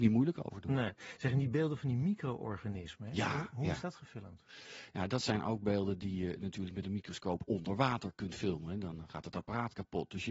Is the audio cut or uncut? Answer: cut